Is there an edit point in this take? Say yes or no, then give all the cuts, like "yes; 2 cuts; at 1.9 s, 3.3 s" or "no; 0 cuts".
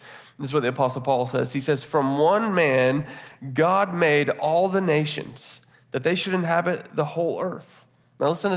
no; 0 cuts